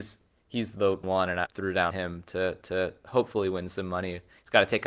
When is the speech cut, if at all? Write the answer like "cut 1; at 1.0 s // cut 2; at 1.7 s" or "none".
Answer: cut 1; at 1.0 s // cut 2; at 1.5 s // cut 3; at 1.9 s // cut 4; at 2.6 s